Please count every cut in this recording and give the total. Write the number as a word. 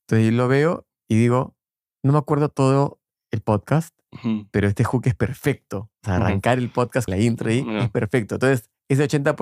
two